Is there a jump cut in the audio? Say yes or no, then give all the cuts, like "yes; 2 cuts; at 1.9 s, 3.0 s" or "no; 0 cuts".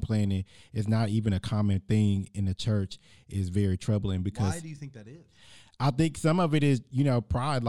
no; 0 cuts